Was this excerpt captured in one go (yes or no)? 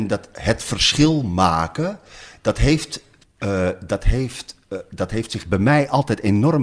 no